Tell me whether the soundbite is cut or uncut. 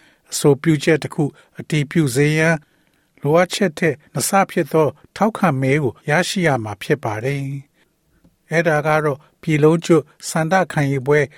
cut